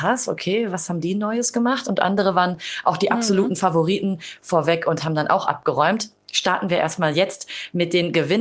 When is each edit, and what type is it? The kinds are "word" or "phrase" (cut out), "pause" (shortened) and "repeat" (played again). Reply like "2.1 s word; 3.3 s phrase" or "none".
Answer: none